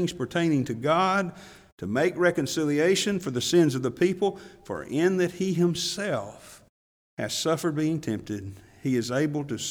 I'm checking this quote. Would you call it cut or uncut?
uncut